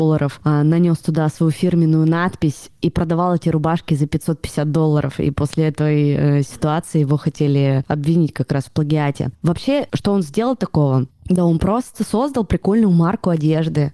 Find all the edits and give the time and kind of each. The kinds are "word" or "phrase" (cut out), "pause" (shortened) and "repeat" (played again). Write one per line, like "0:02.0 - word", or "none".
0:09.3 - pause